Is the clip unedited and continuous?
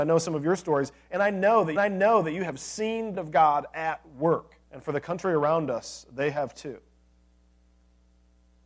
no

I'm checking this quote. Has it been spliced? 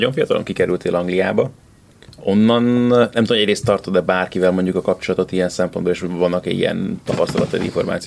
no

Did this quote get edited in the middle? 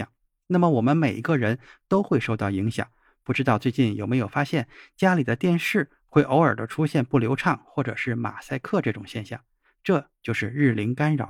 no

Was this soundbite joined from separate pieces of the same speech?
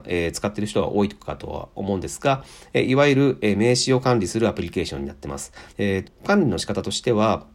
yes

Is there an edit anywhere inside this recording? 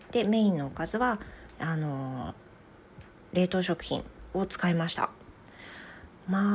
no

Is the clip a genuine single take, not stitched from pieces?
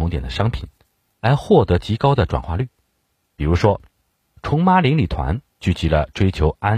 no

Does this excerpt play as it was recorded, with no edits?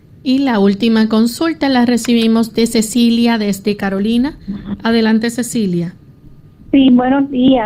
yes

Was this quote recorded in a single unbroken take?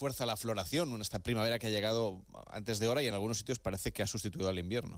yes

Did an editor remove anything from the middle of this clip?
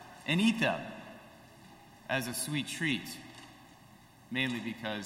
no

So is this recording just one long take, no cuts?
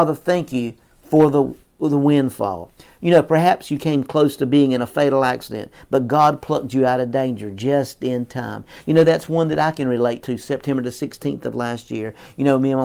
yes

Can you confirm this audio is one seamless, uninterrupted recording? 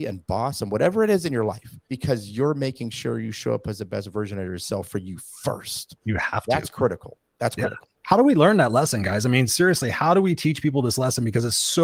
no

